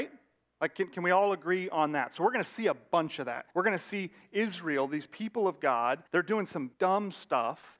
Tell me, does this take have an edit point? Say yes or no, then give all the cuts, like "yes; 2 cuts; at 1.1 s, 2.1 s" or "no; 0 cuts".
yes; 3 cuts; at 3.5 s, 6.1 s, 6.7 s